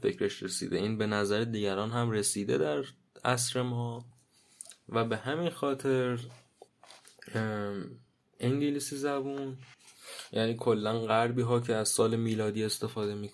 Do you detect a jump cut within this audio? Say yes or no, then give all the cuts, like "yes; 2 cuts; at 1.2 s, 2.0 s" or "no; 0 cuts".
no; 0 cuts